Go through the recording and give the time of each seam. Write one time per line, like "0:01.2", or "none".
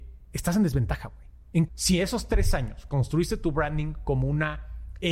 0:01.7